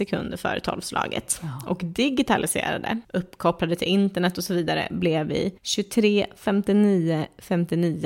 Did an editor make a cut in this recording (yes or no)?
yes